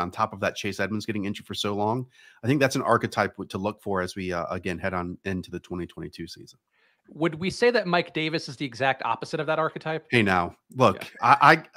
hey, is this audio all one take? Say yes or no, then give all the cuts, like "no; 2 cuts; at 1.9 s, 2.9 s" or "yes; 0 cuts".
yes; 0 cuts